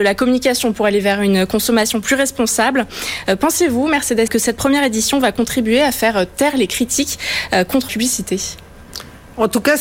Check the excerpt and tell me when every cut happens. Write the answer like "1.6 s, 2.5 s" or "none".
4.3 s, 7.9 s